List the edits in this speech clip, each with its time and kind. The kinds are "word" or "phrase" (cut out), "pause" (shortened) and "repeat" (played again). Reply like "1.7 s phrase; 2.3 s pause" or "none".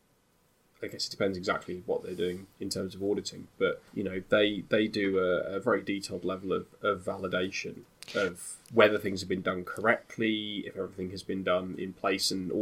2.5 s pause; 3.9 s pause; 8.6 s pause